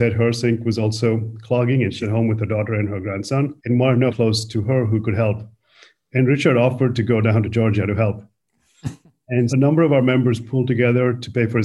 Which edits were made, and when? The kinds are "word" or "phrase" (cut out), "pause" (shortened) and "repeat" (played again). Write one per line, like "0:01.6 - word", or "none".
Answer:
0:02.0 - word
0:03.6 - pause
0:04.1 - phrase
0:09.5 - word